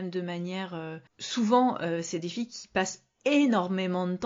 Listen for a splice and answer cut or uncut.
cut